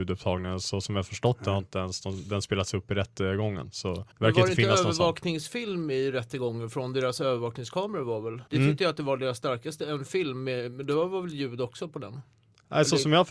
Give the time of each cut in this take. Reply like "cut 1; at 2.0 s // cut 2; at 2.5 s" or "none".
cut 1; at 4.1 s // cut 2; at 8.5 s